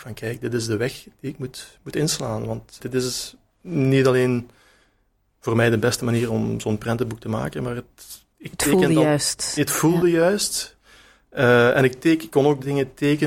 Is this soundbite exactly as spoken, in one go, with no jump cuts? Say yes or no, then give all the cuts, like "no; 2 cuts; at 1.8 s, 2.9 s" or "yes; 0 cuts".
no; 2 cuts; at 2.8 s, 8.3 s